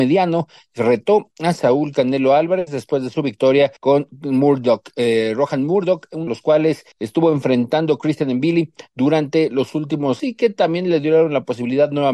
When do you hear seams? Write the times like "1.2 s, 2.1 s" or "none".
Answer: 3.8 s, 6.3 s, 6.9 s, 10.2 s

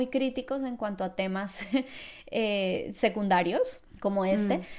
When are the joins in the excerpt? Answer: 3.9 s

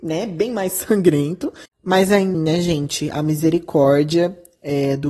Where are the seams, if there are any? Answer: 1.7 s, 2.3 s

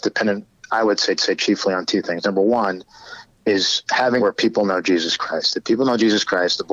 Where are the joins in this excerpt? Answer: 1.2 s, 4.2 s

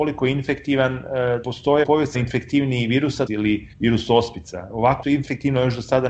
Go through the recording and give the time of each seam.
1.4 s, 1.8 s, 2.1 s, 3.3 s, 3.7 s, 5.0 s

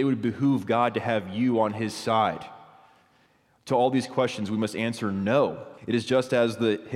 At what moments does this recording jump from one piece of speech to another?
5.8 s

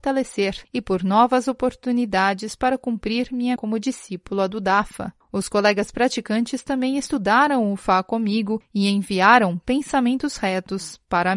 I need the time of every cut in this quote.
3.6 s

